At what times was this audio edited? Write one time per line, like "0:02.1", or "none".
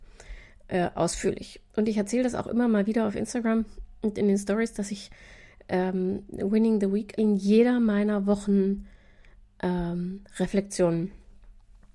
0:07.2